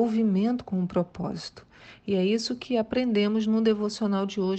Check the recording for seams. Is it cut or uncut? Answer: uncut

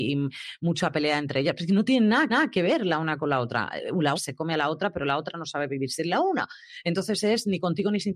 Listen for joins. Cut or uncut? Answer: cut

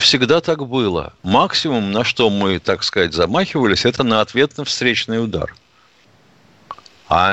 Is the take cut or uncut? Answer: cut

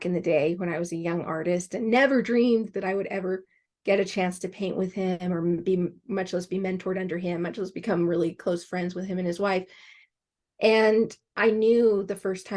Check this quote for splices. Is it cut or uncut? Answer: uncut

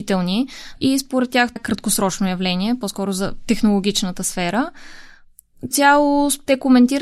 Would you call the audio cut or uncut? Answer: cut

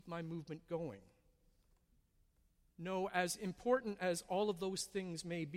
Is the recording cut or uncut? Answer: uncut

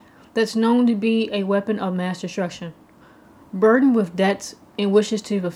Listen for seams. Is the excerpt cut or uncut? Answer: uncut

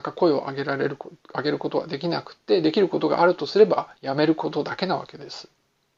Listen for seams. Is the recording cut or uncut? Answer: cut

